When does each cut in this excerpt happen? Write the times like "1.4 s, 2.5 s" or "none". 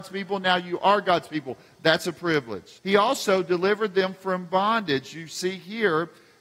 2.8 s